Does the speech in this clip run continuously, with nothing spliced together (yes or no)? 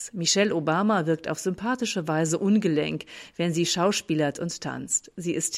yes